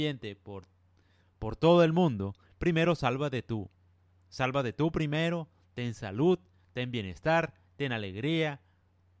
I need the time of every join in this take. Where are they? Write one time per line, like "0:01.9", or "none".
none